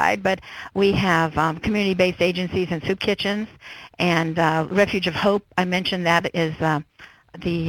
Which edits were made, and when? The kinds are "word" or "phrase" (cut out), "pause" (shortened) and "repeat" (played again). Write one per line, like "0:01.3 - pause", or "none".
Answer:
none